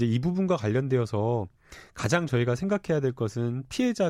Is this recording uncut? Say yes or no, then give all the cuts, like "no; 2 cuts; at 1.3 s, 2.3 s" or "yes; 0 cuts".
yes; 0 cuts